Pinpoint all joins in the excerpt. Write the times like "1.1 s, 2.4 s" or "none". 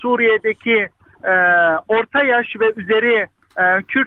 none